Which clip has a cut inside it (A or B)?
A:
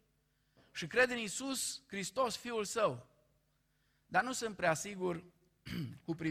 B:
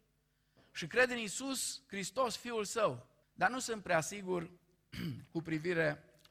B